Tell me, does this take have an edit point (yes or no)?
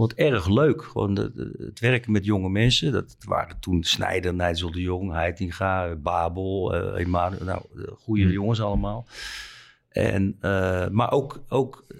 no